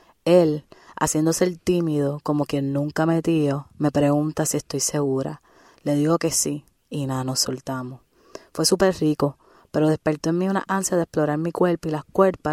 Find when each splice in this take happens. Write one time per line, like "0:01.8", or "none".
none